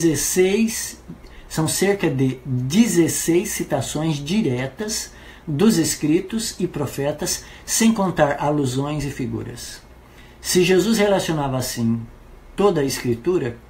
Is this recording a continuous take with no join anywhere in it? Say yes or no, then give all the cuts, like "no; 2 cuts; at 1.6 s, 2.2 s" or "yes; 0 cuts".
yes; 0 cuts